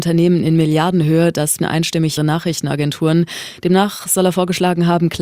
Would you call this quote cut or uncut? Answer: cut